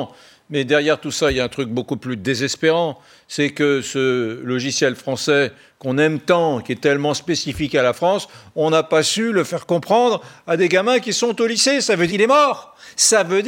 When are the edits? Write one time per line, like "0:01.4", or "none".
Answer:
0:12.1